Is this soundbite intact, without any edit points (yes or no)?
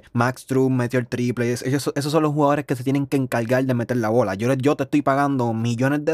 yes